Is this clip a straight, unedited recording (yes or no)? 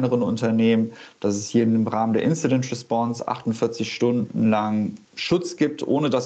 no